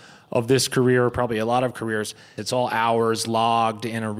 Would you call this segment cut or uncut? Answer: cut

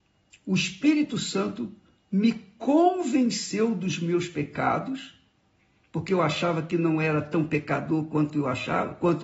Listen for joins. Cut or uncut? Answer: uncut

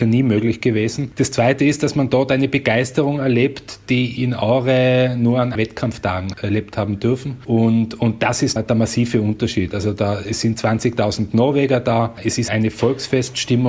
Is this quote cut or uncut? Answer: cut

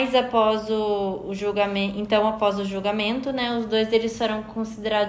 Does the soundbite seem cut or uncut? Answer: uncut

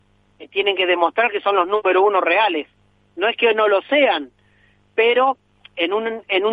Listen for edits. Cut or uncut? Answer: uncut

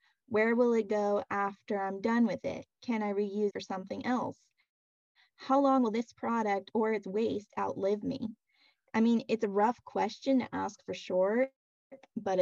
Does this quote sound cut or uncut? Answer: cut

